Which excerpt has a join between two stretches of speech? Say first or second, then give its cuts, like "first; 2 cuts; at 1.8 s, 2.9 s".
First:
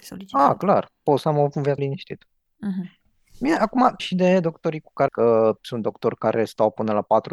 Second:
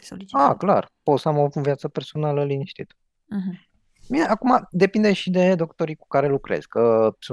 first; 3 cuts; at 1.8 s, 4.0 s, 5.1 s